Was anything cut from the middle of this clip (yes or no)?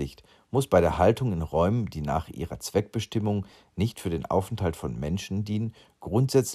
no